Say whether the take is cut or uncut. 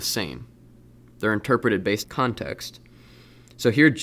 cut